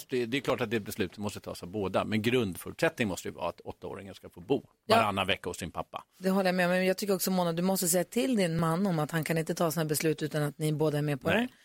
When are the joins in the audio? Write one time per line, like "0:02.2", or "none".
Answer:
none